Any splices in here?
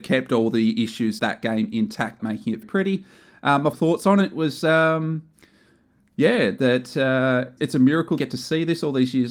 yes; 6 cuts; at 1.2 s, 2.2 s, 2.6 s, 3.7 s, 7.6 s, 8.2 s

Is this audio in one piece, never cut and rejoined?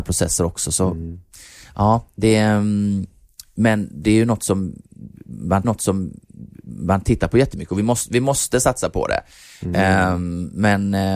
no; 1 cut; at 5.6 s

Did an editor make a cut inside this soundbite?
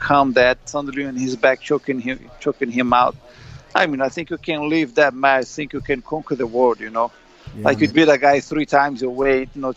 yes; 1 cut; at 7.9 s

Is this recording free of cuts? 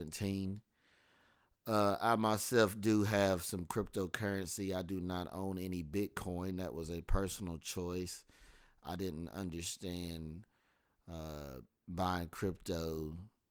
yes; 0 cuts

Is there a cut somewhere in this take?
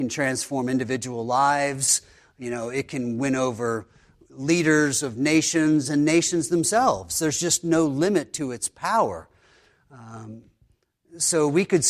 no; 0 cuts

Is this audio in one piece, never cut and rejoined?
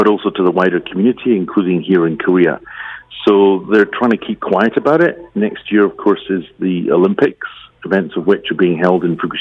yes; 0 cuts

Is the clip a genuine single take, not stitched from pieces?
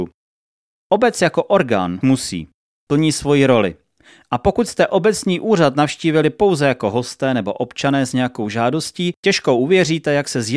no; 2 cuts; at 2.0 s, 9.2 s

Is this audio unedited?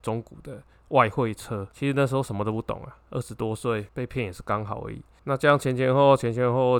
no; 1 cut; at 3.9 s

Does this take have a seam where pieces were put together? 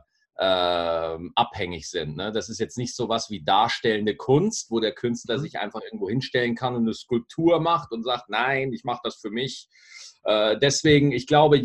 no; 0 cuts

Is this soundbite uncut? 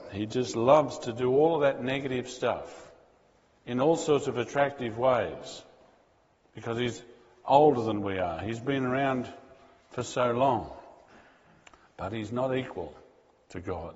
yes; 0 cuts

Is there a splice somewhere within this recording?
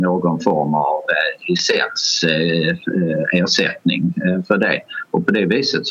no; 0 cuts

